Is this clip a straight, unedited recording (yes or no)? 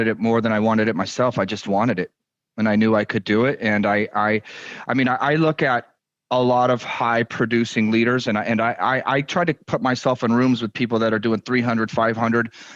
yes